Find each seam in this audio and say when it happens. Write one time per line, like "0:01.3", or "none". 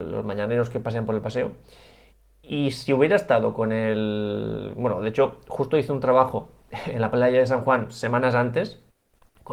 none